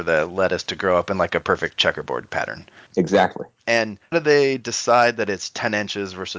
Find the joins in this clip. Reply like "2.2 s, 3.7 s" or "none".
4.1 s